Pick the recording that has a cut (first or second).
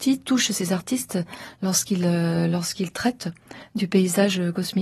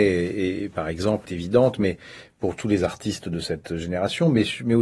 second